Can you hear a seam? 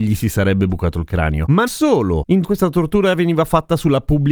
yes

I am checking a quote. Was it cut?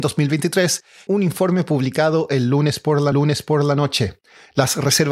yes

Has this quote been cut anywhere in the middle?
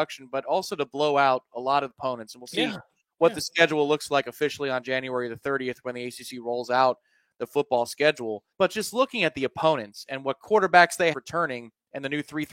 yes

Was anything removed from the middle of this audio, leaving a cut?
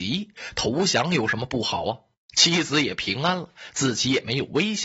no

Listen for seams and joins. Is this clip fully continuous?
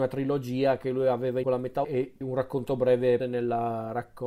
no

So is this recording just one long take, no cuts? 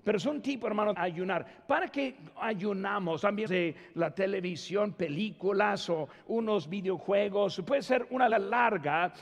no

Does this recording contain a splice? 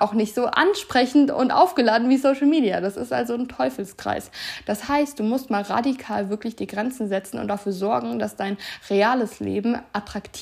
no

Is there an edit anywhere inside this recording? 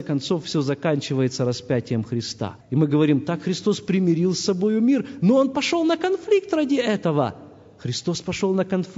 no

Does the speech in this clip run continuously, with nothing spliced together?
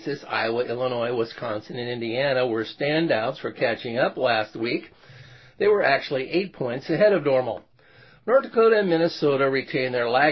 yes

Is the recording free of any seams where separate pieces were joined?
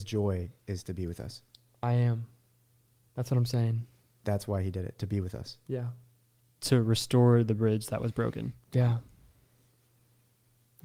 yes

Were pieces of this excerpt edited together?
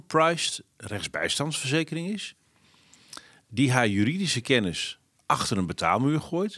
yes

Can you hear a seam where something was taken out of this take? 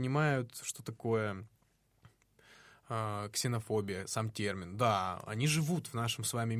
no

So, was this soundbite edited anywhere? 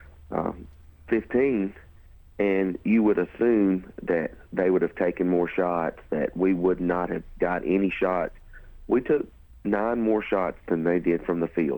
no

